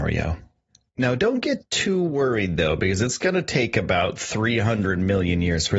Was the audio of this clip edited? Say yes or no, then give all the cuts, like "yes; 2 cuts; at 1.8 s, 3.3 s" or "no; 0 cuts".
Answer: no; 0 cuts